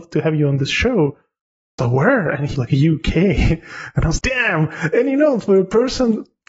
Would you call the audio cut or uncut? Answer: cut